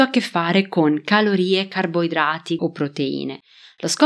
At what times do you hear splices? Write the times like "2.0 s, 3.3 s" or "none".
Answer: 2.6 s

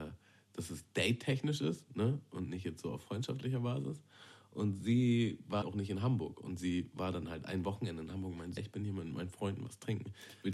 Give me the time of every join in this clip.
5.6 s, 8.6 s

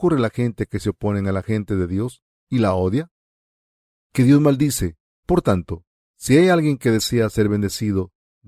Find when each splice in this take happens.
none

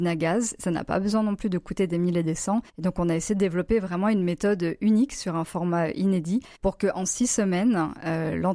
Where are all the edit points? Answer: 2.7 s, 6.5 s

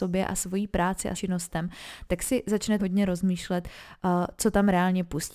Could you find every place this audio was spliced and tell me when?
1.1 s, 2.8 s

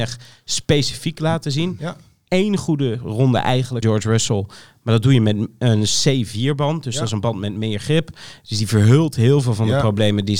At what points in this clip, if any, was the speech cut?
3.8 s

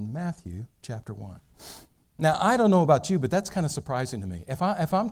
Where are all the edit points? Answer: none

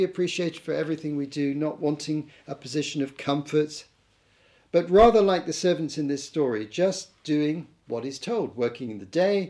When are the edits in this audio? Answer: none

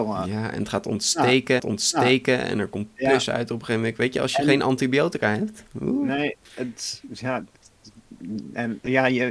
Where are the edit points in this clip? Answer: 1.6 s, 6.4 s

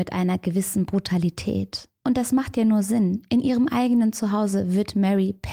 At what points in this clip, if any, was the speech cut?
none

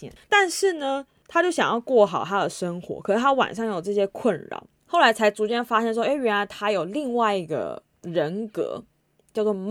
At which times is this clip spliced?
4.7 s

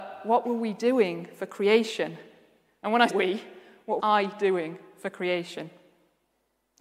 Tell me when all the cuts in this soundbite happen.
3.1 s, 4.0 s

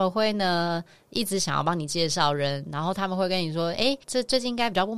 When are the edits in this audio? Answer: 4.0 s

